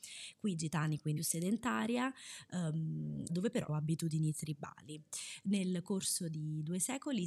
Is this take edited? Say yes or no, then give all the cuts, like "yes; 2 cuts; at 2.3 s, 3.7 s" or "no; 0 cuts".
yes; 3 cuts; at 1.2 s, 3.3 s, 3.7 s